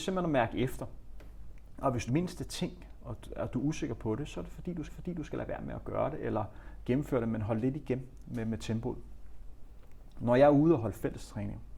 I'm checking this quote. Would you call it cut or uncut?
cut